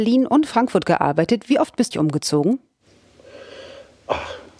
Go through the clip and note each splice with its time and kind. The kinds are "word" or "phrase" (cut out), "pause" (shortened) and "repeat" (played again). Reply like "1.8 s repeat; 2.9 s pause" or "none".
1.9 s phrase